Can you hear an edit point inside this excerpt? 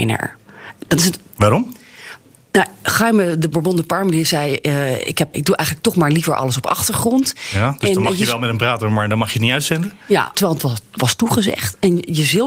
yes; 2 cuts; at 5.3 s, 10.3 s

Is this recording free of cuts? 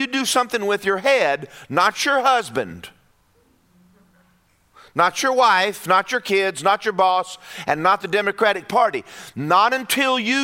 yes; 0 cuts

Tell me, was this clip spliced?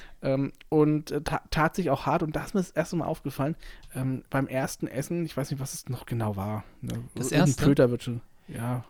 yes; 1 cut; at 4.3 s

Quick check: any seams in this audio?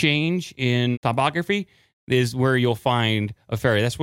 yes; 1 cut; at 0.9 s

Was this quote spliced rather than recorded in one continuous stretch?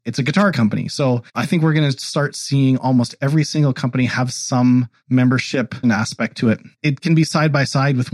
yes; 3 cuts; at 1.3 s, 5.8 s, 6.7 s

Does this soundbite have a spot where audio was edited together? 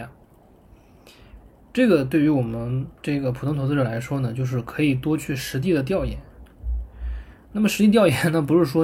yes; 2 cuts; at 1.6 s, 3.0 s

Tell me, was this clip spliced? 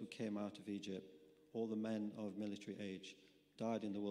no; 0 cuts

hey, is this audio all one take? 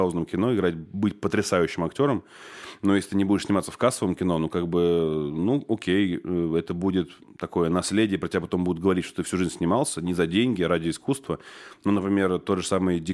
yes; 0 cuts

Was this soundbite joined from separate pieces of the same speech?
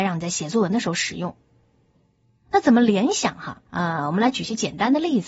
yes; 1 cut; at 3.7 s

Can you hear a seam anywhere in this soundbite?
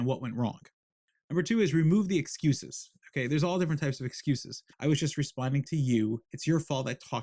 yes; 2 cuts; at 4.7 s, 6.3 s

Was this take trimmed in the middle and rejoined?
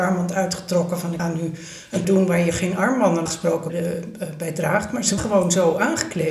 yes; 5 cuts; at 1.2 s, 2.0 s, 3.3 s, 3.7 s, 5.2 s

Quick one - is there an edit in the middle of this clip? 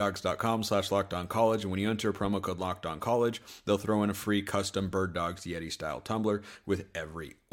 no; 0 cuts

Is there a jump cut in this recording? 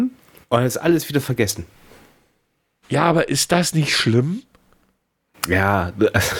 no; 0 cuts

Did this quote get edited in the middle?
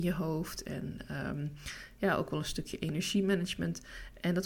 no; 0 cuts

